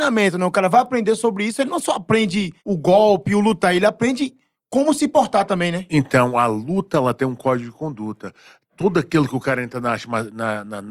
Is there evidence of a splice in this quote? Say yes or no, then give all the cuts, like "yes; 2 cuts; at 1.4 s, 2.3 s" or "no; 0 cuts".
yes; 1 cut; at 2.6 s